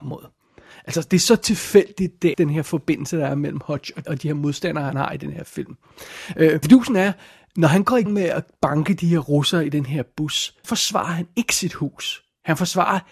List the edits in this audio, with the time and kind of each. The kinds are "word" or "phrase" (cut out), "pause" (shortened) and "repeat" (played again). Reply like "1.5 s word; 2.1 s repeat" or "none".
2.3 s word; 4.0 s word; 6.6 s word; 8.1 s word; 10.6 s word